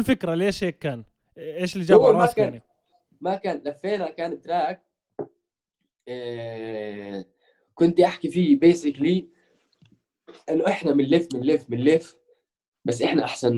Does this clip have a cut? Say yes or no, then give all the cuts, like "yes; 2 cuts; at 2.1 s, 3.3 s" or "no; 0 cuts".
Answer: no; 0 cuts